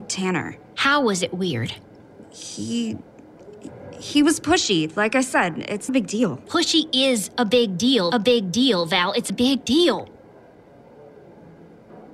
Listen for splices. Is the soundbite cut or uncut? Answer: cut